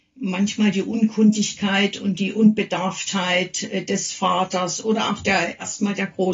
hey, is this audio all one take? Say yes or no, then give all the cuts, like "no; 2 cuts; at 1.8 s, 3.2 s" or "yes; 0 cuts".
yes; 0 cuts